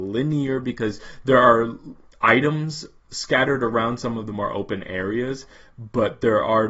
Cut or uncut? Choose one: uncut